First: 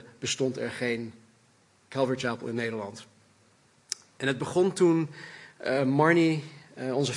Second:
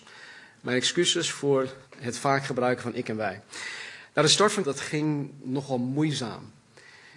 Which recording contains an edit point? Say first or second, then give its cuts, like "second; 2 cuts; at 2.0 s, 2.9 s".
second; 2 cuts; at 1.9 s, 4.6 s